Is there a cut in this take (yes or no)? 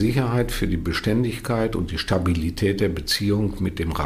no